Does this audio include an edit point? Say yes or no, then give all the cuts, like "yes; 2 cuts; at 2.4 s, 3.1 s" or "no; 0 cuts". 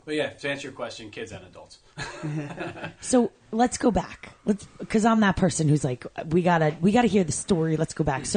no; 0 cuts